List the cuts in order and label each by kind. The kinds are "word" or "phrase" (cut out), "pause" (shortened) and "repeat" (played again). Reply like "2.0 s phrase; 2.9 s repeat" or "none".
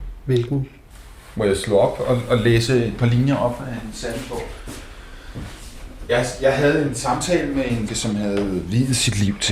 7.9 s word